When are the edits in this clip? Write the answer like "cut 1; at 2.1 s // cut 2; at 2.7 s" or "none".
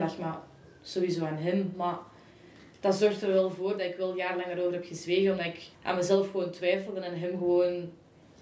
cut 1; at 5.7 s

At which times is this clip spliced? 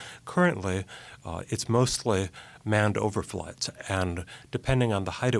none

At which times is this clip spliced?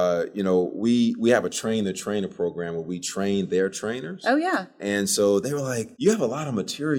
cut 1; at 5.9 s

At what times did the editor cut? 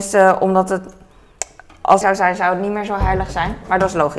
cut 1; at 2.0 s

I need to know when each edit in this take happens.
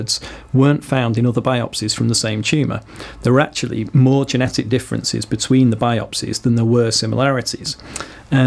none

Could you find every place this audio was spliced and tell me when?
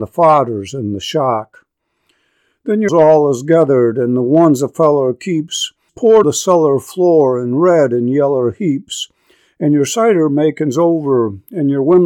cut 1; at 2.9 s // cut 2; at 5.9 s // cut 3; at 6.2 s

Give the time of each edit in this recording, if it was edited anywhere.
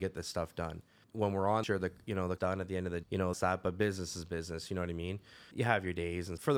cut 1; at 1.6 s // cut 2; at 2.4 s // cut 3; at 3.0 s // cut 4; at 3.3 s

